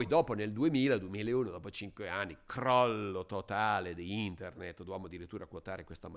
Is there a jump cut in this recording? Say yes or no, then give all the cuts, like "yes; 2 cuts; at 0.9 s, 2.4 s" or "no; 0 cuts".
no; 0 cuts